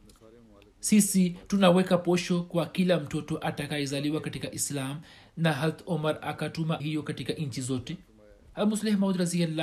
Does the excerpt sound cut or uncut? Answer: cut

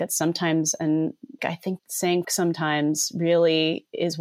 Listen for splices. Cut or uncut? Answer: cut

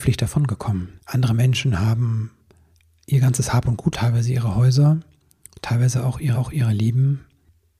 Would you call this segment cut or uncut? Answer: cut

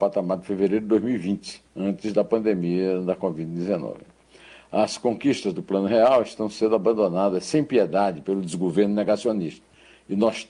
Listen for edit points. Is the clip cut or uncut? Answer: cut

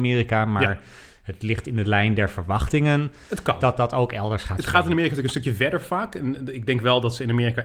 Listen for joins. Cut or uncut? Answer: uncut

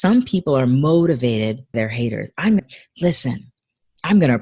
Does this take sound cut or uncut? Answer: cut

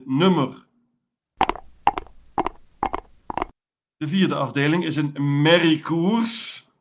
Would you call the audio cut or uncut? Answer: uncut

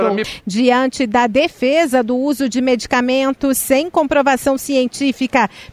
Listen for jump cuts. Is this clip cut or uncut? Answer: uncut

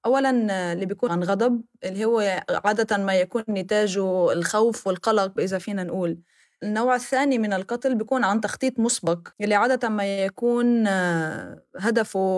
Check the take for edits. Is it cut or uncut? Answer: cut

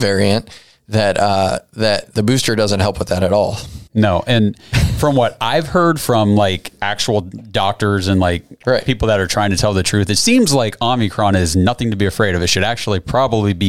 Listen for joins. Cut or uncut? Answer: cut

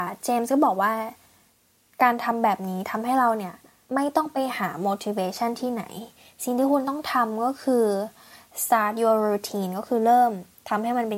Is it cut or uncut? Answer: uncut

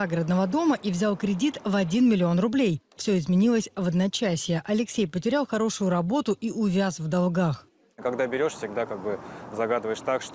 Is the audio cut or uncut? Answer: uncut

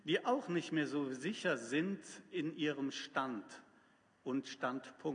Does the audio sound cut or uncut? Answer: uncut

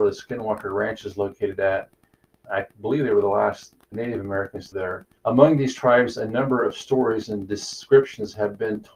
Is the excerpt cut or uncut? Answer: cut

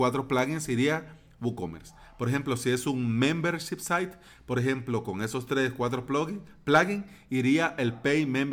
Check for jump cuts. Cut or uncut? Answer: uncut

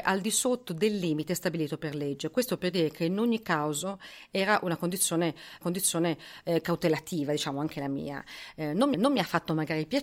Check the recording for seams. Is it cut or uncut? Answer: cut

